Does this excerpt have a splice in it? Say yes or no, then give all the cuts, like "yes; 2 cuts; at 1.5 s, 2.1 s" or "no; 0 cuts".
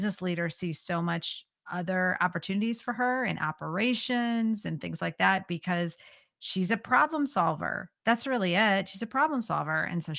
no; 0 cuts